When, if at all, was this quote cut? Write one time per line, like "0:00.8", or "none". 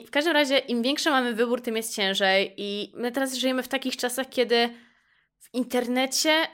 none